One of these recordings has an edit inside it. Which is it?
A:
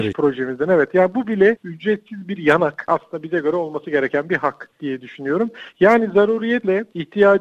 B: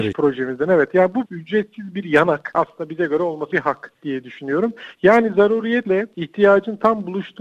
B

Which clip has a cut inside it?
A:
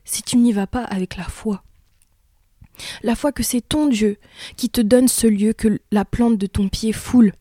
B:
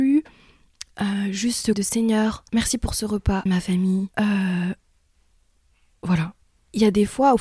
B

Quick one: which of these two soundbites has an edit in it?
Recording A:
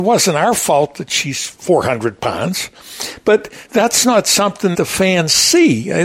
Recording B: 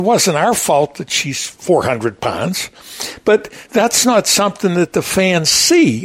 A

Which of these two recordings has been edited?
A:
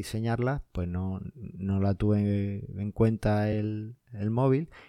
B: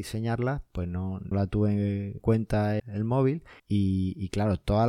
B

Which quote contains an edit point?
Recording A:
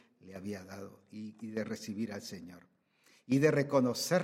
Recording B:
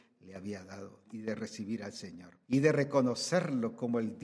B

